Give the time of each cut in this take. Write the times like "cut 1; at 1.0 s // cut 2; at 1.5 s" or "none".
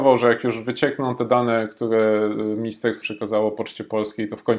cut 1; at 3.0 s